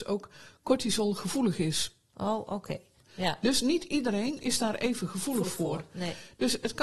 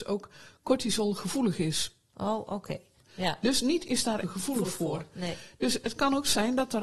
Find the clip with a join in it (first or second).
second